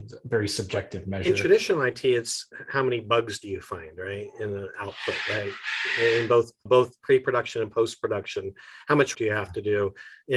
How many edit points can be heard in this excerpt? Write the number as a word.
two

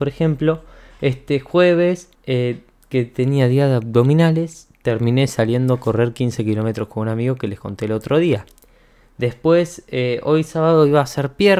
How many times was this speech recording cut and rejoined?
one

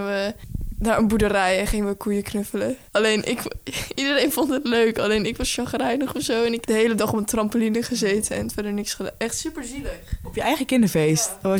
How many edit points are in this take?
two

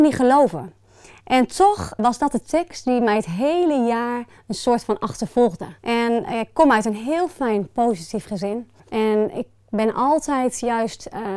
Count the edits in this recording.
three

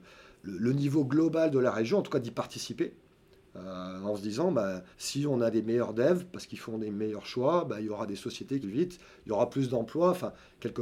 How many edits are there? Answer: two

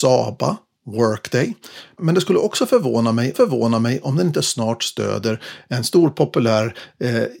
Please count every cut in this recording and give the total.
one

